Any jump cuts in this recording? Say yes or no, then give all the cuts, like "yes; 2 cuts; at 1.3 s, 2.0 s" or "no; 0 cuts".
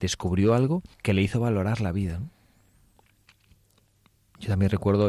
yes; 1 cut; at 0.9 s